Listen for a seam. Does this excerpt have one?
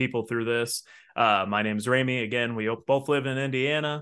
no; 0 cuts

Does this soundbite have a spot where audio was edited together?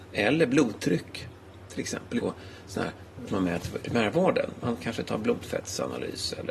yes; 3 cuts; at 2.2 s, 3.3 s, 3.8 s

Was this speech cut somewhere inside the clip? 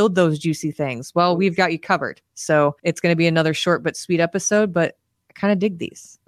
yes; 1 cut; at 2.8 s

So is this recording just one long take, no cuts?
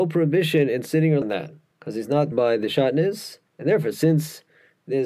no; 4 cuts; at 1.2 s, 1.7 s, 2.3 s, 3.5 s

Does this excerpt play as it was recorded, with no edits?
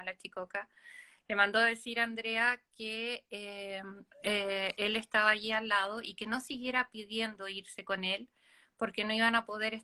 no; 1 cut; at 4.1 s

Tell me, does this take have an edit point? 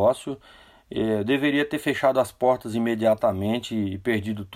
no; 0 cuts

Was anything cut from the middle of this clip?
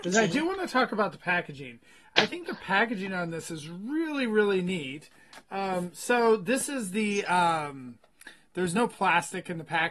no; 0 cuts

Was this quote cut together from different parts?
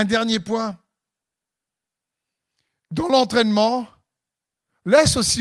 no; 0 cuts

